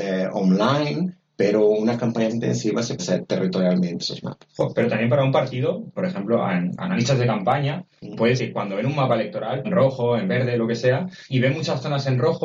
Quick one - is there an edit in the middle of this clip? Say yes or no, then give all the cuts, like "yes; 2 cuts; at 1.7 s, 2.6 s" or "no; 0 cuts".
yes; 7 cuts; at 2.3 s, 3.0 s, 4.0 s, 6.0 s, 8.4 s, 9.6 s, 11.3 s